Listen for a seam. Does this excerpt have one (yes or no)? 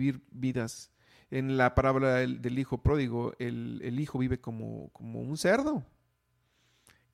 no